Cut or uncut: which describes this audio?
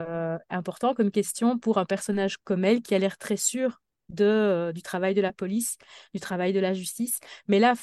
uncut